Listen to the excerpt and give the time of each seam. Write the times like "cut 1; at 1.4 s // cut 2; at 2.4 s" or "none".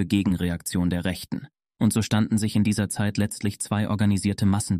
none